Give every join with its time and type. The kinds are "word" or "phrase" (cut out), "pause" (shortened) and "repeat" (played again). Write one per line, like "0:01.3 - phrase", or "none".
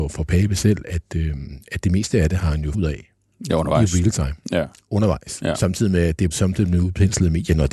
0:02.7 - word
0:06.3 - phrase